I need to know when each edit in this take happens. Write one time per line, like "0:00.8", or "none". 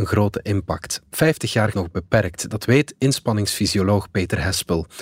0:01.7